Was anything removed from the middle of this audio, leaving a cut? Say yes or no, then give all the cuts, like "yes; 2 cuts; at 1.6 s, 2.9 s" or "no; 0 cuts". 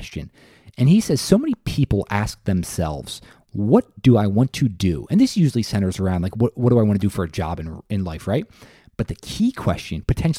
no; 0 cuts